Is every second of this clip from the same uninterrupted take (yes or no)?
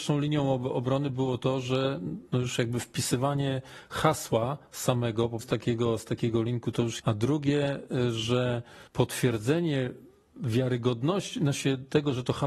no